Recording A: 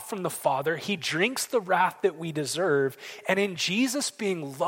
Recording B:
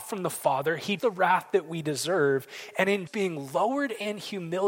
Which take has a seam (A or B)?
B